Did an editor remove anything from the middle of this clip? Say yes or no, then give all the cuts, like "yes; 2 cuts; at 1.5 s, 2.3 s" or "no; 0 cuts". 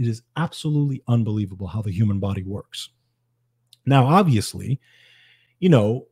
no; 0 cuts